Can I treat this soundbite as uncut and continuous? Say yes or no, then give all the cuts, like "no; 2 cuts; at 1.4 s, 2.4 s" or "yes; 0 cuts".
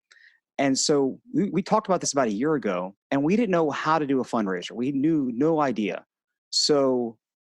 no; 2 cuts; at 1.2 s, 3.0 s